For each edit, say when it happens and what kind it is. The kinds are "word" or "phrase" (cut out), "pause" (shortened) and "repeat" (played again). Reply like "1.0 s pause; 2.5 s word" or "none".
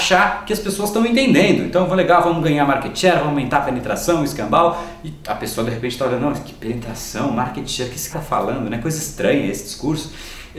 8.1 s word